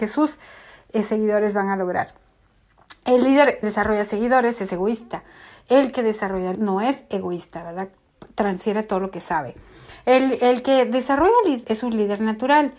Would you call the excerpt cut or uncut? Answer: cut